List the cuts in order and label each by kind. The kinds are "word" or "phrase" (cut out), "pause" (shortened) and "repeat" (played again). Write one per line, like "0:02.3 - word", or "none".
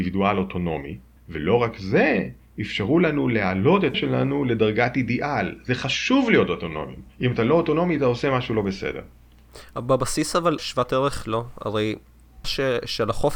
0:01.2 - pause
0:03.9 - word
0:10.6 - word
0:11.2 - word
0:12.4 - word